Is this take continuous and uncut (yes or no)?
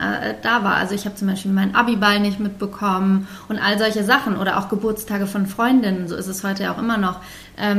yes